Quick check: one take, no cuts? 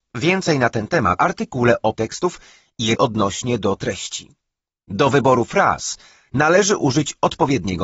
no; 4 cuts; at 1.2 s, 1.9 s, 2.9 s, 3.8 s

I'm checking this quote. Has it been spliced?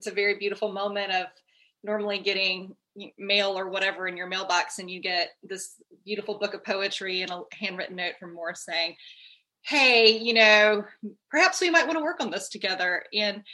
no; 0 cuts

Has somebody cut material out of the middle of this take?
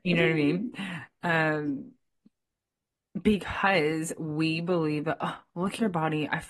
no; 0 cuts

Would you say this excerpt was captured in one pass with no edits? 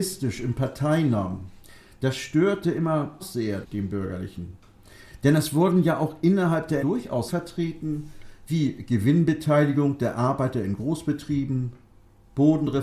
no; 4 cuts; at 3.2 s, 3.6 s, 6.8 s, 7.3 s

